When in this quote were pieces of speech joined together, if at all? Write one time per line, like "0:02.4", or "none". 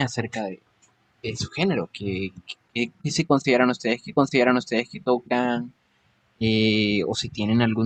0:04.1